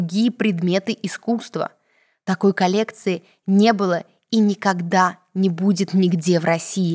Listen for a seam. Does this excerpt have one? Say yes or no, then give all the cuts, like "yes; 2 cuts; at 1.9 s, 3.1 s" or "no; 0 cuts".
no; 0 cuts